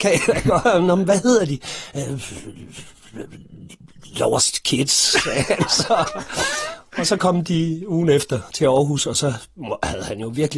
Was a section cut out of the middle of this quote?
no; 0 cuts

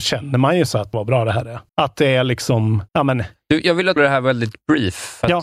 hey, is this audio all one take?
no; 4 cuts; at 0.9 s, 1.7 s, 2.9 s, 4.0 s

